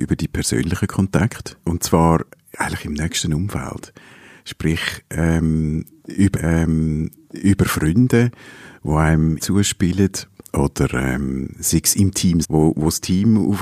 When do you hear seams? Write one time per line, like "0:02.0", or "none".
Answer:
0:01.6
0:06.3
0:09.4
0:12.4